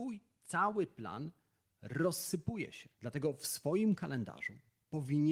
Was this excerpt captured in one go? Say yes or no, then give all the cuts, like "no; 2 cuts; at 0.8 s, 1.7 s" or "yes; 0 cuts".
yes; 0 cuts